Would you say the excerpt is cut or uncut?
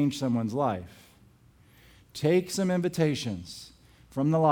uncut